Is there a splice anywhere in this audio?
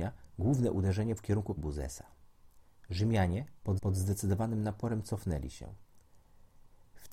yes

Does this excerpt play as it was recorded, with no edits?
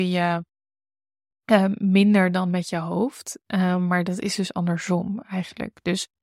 yes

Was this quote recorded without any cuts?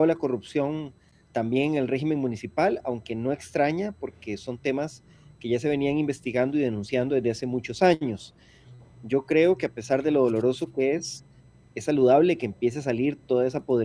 yes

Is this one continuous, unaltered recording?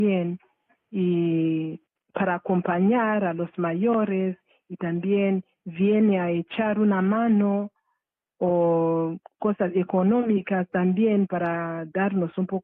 yes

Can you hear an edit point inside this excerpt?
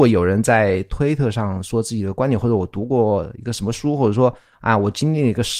no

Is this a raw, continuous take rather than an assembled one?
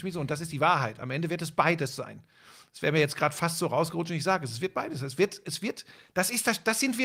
yes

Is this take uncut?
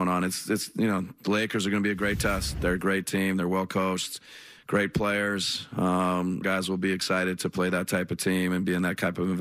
no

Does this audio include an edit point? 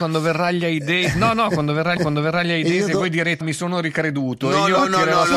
yes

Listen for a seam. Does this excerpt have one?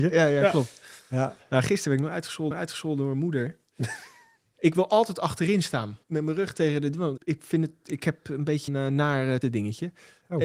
yes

